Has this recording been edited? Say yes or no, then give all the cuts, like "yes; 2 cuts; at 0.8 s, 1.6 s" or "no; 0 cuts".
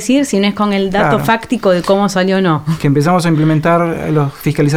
no; 0 cuts